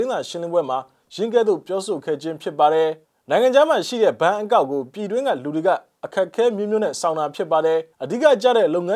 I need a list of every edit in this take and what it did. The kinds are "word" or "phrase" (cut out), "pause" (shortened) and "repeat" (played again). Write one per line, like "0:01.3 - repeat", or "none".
0:03.0 - pause
0:07.9 - pause

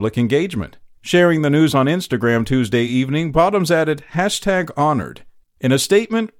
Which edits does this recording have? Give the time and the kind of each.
none

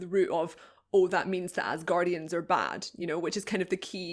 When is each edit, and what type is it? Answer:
none

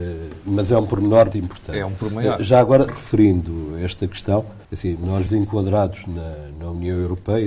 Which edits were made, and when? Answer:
0:01.3 - word
0:02.9 - word
0:04.6 - pause
0:05.3 - word

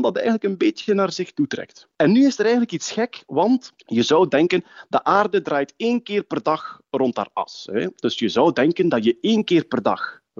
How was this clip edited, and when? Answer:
none

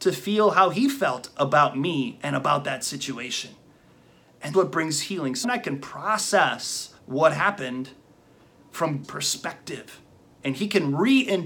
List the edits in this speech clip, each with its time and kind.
0:04.5 - word
0:05.4 - word
0:07.0 - pause
0:09.0 - word

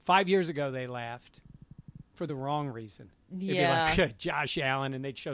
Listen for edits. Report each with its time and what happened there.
none

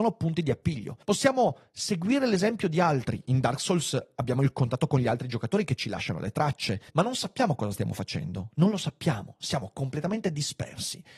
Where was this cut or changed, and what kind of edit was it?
0:01.0 - pause
0:06.9 - pause

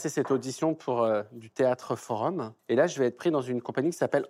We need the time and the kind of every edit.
0:02.6 - pause

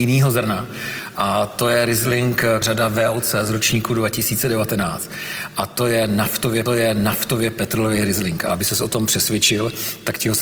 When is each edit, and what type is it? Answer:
0:02.6 - word
0:06.7 - repeat

